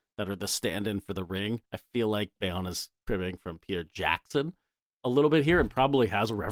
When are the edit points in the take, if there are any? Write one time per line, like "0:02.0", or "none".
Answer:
0:01.6
0:03.0